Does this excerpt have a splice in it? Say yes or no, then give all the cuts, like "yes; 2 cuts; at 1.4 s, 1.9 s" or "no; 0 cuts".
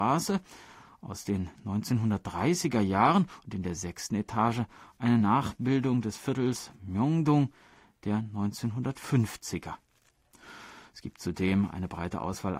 no; 0 cuts